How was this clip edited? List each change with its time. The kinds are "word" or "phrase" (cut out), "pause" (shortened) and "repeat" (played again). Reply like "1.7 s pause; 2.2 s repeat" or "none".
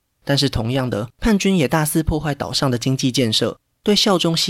1.1 s pause

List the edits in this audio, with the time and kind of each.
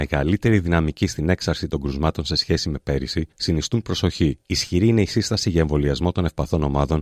3.3 s pause; 4.4 s pause

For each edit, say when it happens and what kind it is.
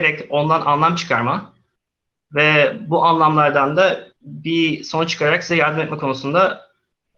4.1 s pause

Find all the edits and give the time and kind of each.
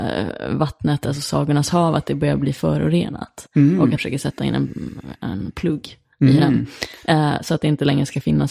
4.0 s word; 6.1 s pause

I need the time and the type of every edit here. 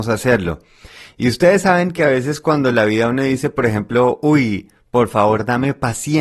none

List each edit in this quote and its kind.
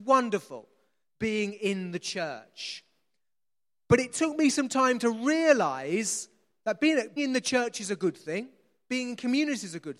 7.2 s word

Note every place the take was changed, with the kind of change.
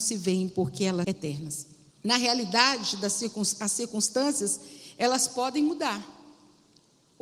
1.0 s word; 1.9 s pause

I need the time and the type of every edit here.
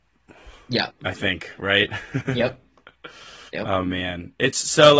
3.5 s pause

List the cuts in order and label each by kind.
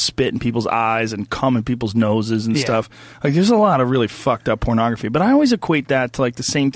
none

